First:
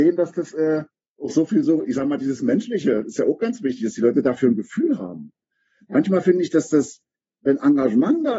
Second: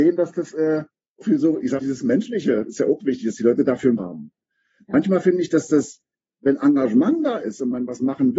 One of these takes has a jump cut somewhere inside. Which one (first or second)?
second